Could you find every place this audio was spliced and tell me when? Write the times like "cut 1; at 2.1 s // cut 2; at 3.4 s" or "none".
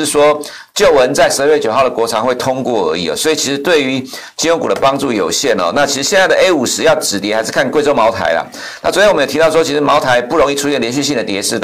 none